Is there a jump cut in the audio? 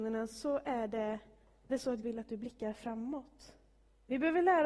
yes; 2 cuts; at 1.7 s, 2.0 s

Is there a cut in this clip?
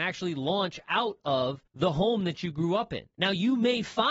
yes; 2 cuts; at 1.7 s, 3.1 s

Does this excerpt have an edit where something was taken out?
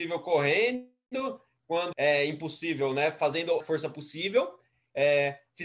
yes; 2 cuts; at 1.9 s, 3.6 s

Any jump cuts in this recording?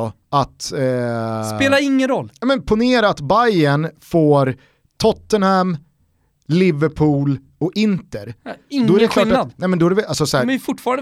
no; 0 cuts

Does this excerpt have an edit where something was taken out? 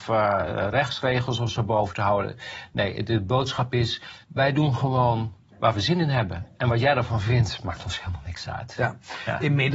yes; 1 cut; at 4.2 s

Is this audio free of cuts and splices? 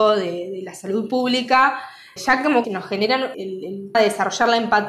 no; 4 cuts; at 2.2 s, 2.6 s, 3.3 s, 3.9 s

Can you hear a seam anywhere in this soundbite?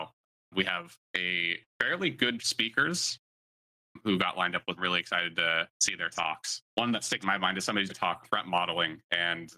yes; 8 cuts; at 1.7 s, 2.4 s, 4.8 s, 5.7 s, 6.7 s, 7.2 s, 7.9 s, 8.2 s

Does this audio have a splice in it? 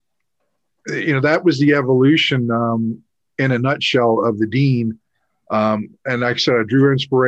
no; 0 cuts

